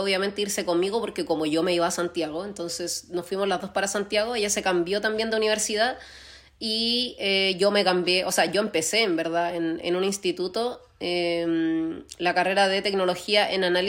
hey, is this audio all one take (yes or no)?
yes